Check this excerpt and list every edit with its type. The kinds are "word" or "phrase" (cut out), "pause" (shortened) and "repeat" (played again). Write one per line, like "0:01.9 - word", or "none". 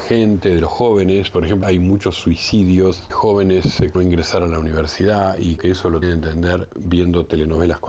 0:01.6 - phrase
0:03.1 - word
0:03.9 - phrase
0:05.6 - word
0:06.0 - word